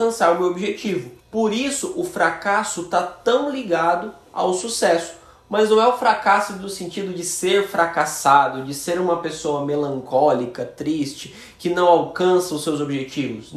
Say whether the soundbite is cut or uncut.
cut